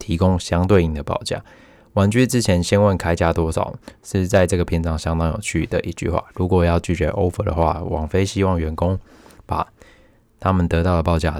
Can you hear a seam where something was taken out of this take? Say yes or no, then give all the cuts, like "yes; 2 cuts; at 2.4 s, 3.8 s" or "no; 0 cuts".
no; 0 cuts